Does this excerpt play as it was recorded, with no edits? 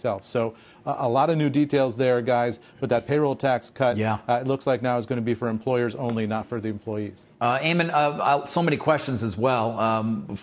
no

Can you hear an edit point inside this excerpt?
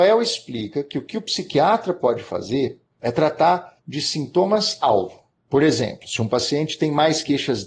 yes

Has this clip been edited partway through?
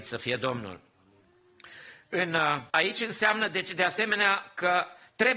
yes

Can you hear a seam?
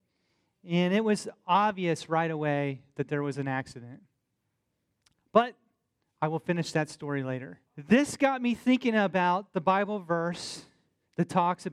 yes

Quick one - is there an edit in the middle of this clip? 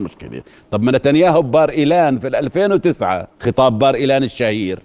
yes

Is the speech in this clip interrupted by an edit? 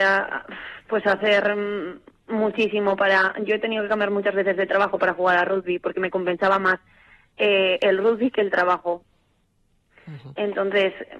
no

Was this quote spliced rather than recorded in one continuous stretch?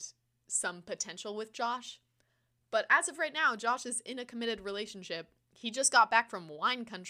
no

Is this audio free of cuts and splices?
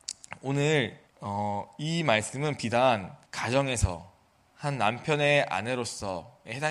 no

